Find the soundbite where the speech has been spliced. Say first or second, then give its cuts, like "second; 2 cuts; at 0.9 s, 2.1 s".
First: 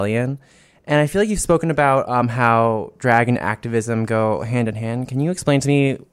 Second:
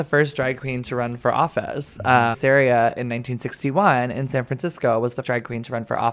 second; 2 cuts; at 2.3 s, 5.2 s